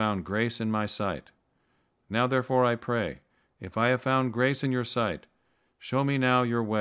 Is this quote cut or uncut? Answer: uncut